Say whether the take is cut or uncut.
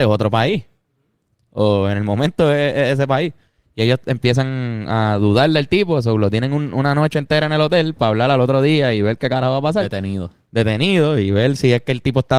uncut